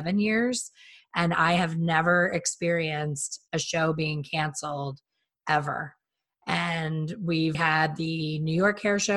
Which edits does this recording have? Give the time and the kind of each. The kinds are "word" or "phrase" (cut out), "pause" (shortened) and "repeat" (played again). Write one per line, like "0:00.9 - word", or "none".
0:07.5 - word